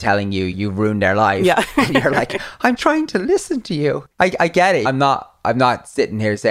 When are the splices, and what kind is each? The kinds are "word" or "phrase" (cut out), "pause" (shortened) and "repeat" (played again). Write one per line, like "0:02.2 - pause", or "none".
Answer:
0:02.8 - word
0:04.1 - pause
0:04.8 - phrase

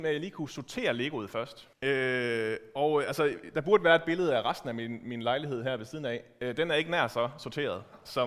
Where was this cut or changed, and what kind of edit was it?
0:01.7 - pause

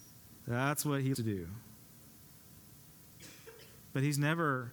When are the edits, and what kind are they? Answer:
0:01.1 - word

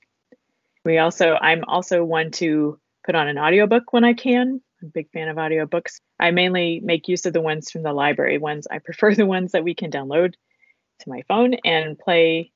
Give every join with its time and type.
none

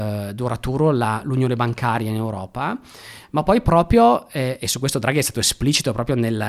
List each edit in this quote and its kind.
none

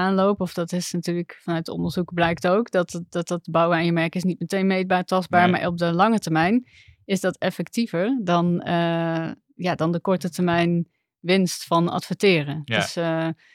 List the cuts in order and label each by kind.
none

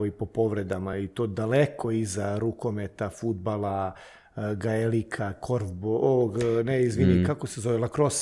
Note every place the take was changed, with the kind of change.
none

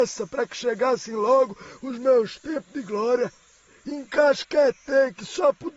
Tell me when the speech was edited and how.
none

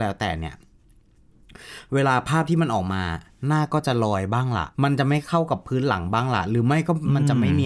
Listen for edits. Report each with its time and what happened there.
0:04.7 - pause

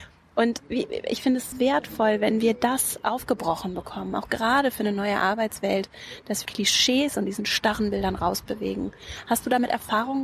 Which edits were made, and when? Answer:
0:01.5 - word
0:06.4 - phrase

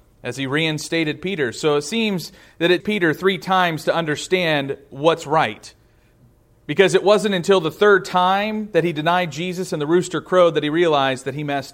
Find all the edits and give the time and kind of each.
0:02.8 - word

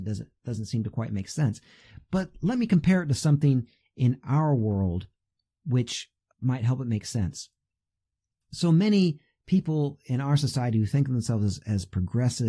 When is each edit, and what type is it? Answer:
none

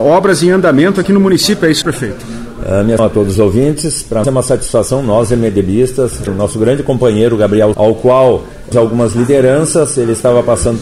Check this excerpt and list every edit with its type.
0:01.8 - word
0:03.0 - word
0:03.3 - word
0:04.2 - word
0:06.3 - word
0:07.7 - word
0:08.7 - word

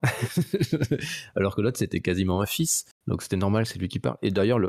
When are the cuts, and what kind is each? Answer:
0:03.0 - pause

